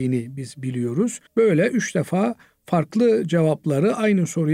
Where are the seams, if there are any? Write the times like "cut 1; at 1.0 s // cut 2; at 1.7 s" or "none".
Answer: cut 1; at 1.3 s